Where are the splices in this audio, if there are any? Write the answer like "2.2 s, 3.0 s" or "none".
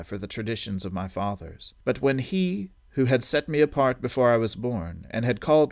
1.8 s